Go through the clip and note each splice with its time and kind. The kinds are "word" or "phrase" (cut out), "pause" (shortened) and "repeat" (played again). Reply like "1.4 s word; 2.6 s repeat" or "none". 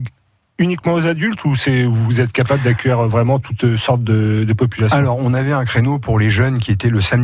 none